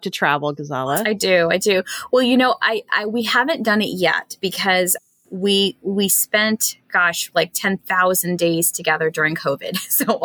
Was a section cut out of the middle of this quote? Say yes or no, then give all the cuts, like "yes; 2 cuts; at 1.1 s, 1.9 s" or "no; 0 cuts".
no; 0 cuts